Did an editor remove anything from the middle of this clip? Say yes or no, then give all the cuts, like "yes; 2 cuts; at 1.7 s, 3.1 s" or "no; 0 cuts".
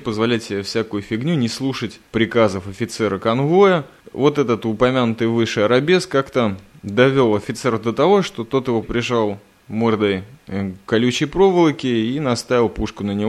yes; 1 cut; at 8.8 s